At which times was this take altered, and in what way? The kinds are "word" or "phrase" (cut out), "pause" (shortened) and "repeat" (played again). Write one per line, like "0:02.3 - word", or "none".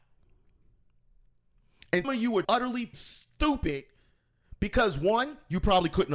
0:02.0 - word
0:02.4 - word
0:02.9 - word